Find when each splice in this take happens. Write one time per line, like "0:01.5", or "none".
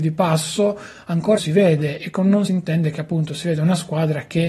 0:01.4
0:02.5